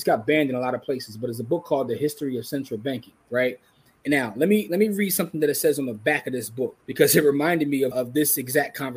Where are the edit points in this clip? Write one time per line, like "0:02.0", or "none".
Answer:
0:03.2
0:06.8
0:07.9